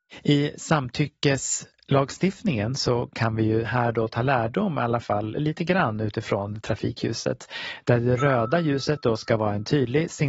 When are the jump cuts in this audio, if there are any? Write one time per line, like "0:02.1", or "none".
none